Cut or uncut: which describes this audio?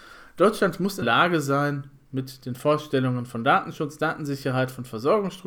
cut